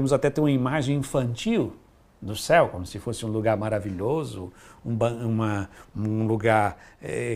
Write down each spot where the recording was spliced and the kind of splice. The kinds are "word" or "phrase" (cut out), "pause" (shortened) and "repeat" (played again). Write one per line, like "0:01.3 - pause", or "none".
none